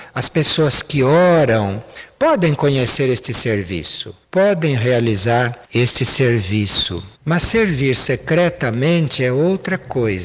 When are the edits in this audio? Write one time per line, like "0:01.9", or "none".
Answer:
0:04.2
0:05.6
0:07.1